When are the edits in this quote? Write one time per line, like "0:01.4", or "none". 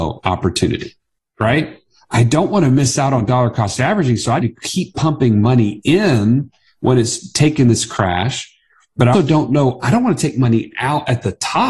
0:04.4
0:09.1

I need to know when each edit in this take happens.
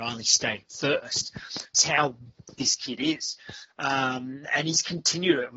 0:01.7
0:02.5

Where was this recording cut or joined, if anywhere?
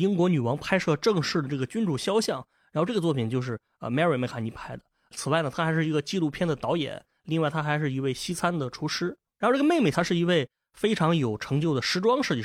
0:09.9

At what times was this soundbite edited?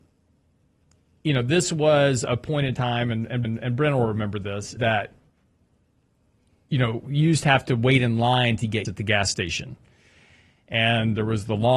0:03.4
0:04.8
0:08.8

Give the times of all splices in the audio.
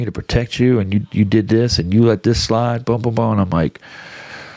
none

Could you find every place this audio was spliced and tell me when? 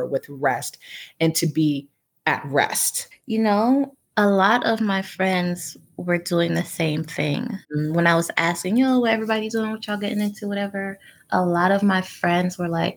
0:03.1
0:07.6

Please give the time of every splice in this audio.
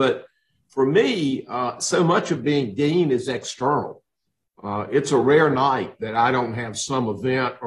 none

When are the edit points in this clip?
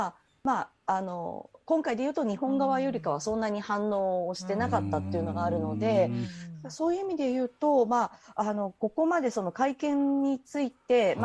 none

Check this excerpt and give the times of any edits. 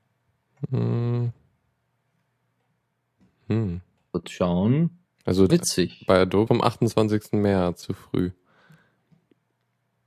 0:05.5
0:06.5
0:07.8

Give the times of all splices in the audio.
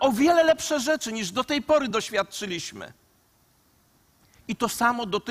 none

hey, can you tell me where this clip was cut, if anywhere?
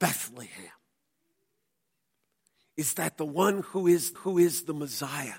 0:04.2

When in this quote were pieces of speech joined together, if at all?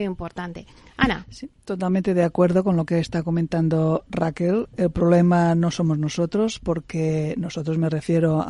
none

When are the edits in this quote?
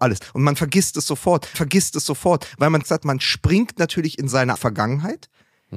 0:01.5
0:02.8
0:04.6

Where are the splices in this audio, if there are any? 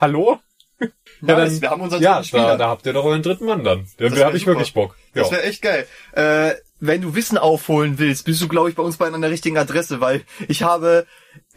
0:01.1

